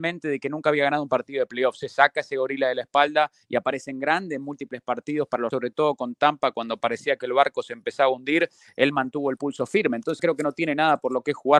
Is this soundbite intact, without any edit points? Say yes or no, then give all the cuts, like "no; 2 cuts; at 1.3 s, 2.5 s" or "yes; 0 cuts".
no; 2 cuts; at 5.5 s, 10.2 s